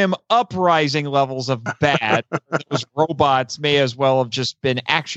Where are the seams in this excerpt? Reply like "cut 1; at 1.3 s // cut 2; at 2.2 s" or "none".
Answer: none